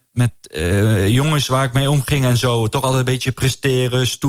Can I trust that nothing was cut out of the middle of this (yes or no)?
yes